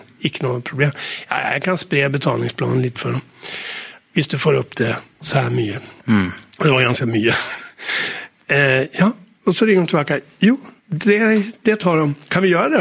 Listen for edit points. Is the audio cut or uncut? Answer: cut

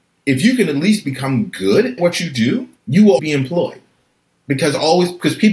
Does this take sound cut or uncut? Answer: cut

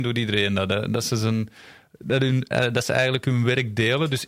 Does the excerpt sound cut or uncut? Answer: uncut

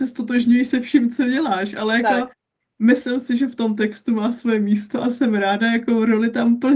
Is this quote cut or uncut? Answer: uncut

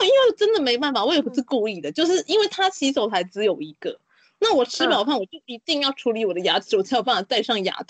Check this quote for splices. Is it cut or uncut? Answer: uncut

